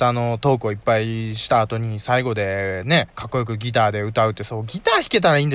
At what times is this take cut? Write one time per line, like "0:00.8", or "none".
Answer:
0:03.1